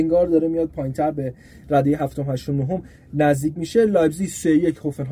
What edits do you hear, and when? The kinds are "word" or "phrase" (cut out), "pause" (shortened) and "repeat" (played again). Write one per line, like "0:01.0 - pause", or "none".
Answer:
none